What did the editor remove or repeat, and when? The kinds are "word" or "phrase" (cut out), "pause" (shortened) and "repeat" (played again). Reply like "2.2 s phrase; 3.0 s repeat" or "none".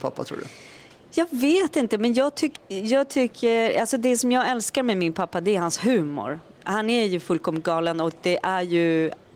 2.6 s word